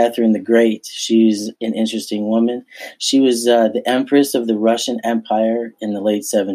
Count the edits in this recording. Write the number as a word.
one